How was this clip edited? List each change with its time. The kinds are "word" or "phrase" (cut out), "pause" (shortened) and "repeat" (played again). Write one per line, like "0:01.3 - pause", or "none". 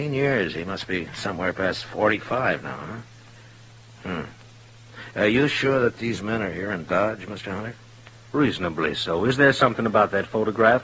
none